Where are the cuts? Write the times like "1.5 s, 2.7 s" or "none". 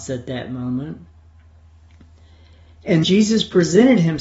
3.0 s